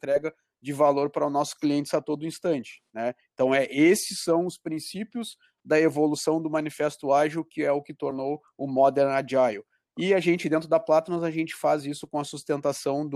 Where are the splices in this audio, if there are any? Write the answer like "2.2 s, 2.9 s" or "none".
none

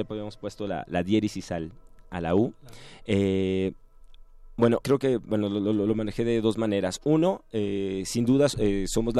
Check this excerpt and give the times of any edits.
4.8 s

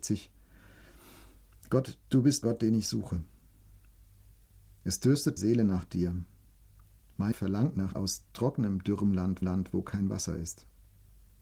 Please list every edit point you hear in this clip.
2.0 s, 2.4 s, 5.4 s, 7.3 s, 7.9 s, 9.4 s

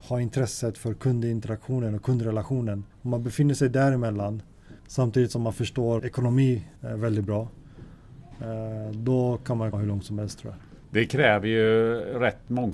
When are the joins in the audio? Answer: 2.9 s, 4.8 s, 6.0 s, 6.8 s, 9.7 s

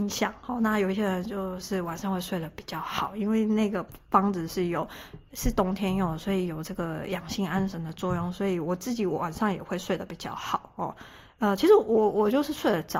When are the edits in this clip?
none

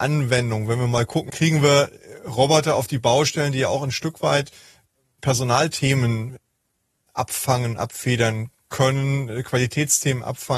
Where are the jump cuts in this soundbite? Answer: 1.3 s

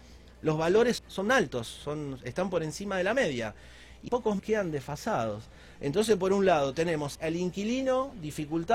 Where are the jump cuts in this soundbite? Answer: 1.0 s, 4.1 s, 4.4 s, 7.1 s

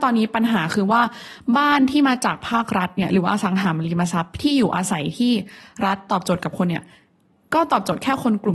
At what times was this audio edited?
none

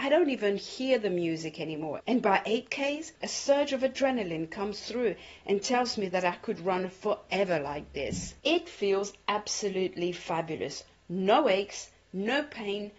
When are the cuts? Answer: 3.2 s

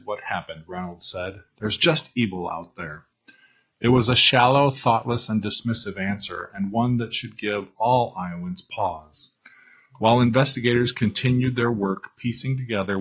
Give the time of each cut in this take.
none

